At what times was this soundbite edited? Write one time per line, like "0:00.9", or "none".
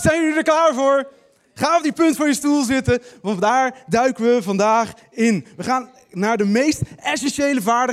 none